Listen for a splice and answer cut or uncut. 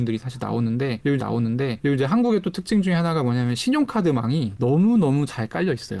cut